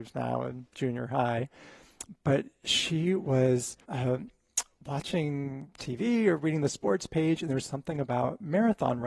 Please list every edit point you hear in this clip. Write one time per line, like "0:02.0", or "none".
0:03.8